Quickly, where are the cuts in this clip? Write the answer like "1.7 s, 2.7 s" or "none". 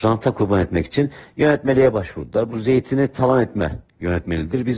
none